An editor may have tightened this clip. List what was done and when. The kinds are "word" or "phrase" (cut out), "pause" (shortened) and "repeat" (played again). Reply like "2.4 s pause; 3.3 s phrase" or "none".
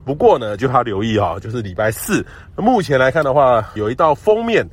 3.8 s word